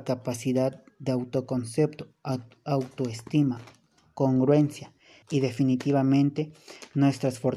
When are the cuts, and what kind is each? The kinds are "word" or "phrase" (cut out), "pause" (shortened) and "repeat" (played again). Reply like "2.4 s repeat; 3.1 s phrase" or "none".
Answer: 5.2 s word